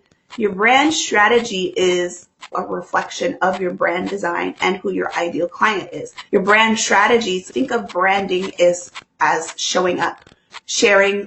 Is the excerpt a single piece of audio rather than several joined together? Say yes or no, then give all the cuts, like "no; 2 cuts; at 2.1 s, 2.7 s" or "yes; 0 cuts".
no; 3 cuts; at 2.5 s, 6.3 s, 7.5 s